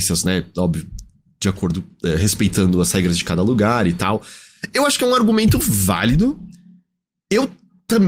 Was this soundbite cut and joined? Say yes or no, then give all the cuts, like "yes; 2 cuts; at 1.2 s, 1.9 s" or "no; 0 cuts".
no; 0 cuts